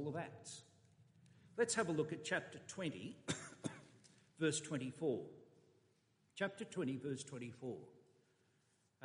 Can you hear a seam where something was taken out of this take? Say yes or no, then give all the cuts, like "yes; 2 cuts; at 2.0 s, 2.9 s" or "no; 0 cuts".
no; 0 cuts